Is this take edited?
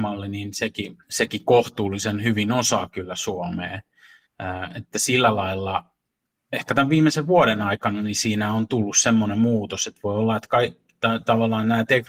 yes; 1 cut; at 1.0 s

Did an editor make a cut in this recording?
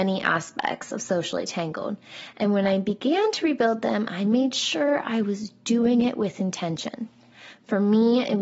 no; 0 cuts

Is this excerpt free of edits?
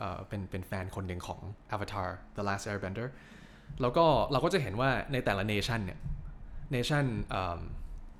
yes; 0 cuts

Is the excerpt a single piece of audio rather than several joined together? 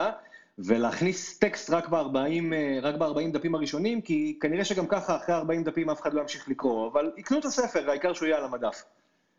yes; 0 cuts

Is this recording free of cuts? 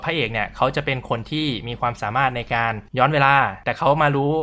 no; 1 cut; at 2.9 s

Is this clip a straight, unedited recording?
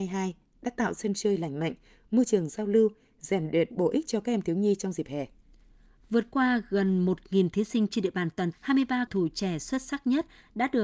no; 2 cuts; at 8.5 s, 9.1 s

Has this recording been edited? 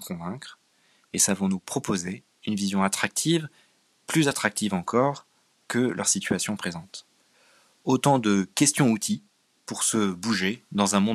no; 0 cuts

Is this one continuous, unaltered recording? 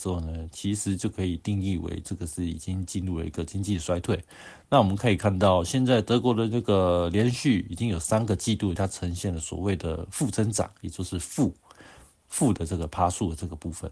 no; 1 cut; at 8.8 s

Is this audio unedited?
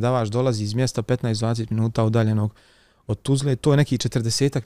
yes; 0 cuts

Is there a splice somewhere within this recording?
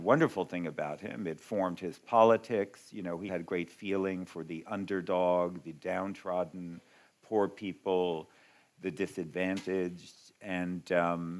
yes; 1 cut; at 3.3 s

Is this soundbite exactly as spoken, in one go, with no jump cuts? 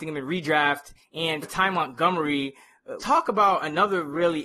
no; 2 cuts; at 1.4 s, 3.0 s

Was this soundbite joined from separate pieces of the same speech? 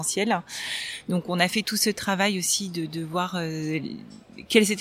no; 0 cuts

